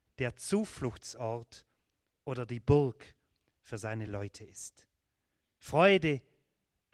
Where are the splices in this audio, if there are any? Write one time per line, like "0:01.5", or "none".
none